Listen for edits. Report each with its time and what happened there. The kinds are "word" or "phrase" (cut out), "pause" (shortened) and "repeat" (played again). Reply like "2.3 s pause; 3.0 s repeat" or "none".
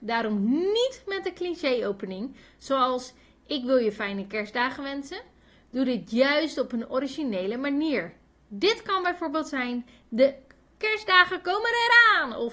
none